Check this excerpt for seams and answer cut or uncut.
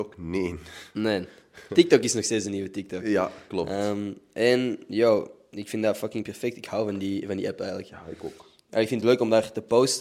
uncut